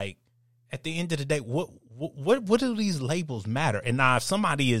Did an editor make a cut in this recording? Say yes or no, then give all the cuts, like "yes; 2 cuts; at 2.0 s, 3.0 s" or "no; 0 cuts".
no; 0 cuts